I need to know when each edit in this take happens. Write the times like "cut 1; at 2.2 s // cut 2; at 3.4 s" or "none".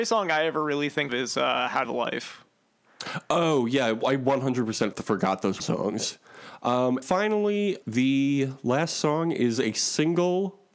cut 1; at 1.1 s // cut 2; at 1.8 s // cut 3; at 4.9 s // cut 4; at 5.6 s // cut 5; at 7.0 s // cut 6; at 7.8 s